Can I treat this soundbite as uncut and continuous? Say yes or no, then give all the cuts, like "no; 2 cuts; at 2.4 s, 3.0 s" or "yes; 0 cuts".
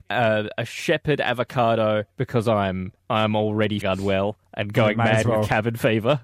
no; 4 cuts; at 2.1 s, 3.0 s, 3.8 s, 4.5 s